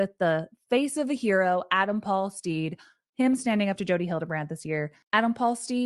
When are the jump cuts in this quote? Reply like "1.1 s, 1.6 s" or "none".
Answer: none